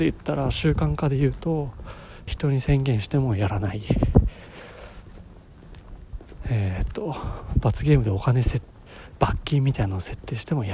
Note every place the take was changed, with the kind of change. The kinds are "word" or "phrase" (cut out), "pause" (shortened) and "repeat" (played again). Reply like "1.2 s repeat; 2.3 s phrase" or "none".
2.3 s phrase

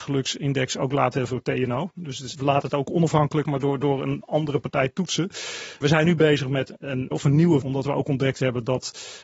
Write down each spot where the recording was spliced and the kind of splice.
1.3 s word; 2.3 s word; 3.4 s word; 7.1 s word; 7.6 s word

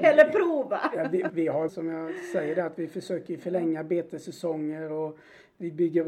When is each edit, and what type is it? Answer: 1.3 s word; 1.7 s word

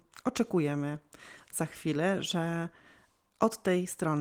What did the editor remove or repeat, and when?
none

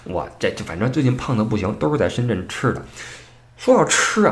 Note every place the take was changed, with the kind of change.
none

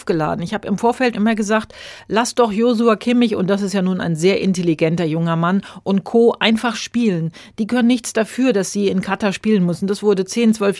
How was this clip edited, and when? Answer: 1.1 s word

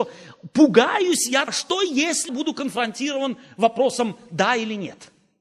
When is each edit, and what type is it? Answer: 1.5 s word; 2.3 s word

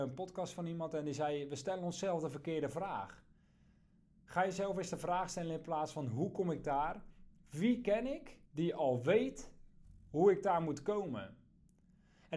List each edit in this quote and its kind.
8.4 s pause

